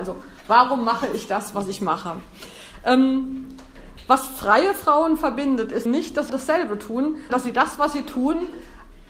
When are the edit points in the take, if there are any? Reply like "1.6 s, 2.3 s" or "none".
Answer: 5.9 s, 6.3 s, 7.3 s